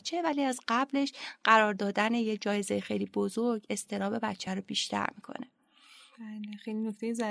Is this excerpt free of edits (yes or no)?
yes